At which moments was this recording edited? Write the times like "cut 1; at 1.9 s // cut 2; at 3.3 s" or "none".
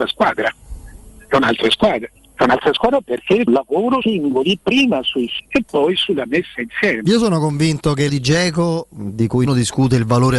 cut 1; at 2.2 s // cut 2; at 3.5 s // cut 3; at 4.0 s // cut 4; at 5.4 s // cut 5; at 8.1 s // cut 6; at 9.5 s